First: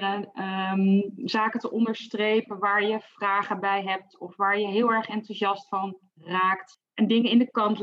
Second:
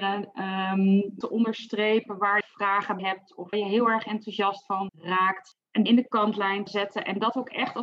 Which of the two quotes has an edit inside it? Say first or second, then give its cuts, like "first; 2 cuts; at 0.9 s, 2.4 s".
second; 7 cuts; at 1.2 s, 2.4 s, 3.0 s, 3.5 s, 4.9 s, 5.9 s, 6.7 s